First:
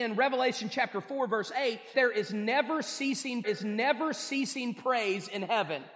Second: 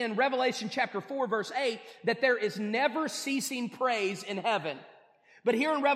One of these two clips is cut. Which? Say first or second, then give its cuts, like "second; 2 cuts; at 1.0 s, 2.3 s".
first; 2 cuts; at 1.9 s, 3.4 s